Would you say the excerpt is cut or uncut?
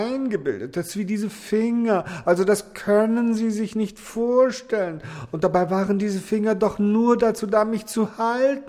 uncut